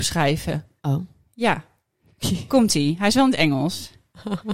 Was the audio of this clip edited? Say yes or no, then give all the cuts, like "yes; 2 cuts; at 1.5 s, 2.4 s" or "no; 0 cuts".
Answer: no; 0 cuts